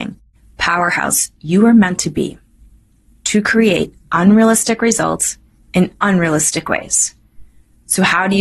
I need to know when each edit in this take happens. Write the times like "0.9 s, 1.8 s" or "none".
none